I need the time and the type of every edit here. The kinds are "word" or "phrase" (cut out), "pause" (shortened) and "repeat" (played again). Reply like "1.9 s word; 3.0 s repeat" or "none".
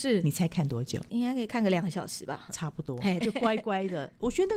3.2 s word